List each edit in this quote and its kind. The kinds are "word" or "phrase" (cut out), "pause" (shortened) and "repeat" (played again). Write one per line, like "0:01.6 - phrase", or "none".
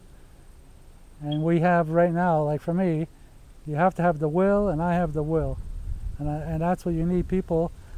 none